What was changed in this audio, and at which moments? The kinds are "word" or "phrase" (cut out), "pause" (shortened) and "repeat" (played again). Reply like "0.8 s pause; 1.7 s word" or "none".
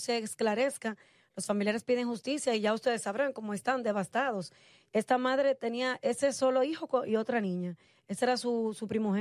none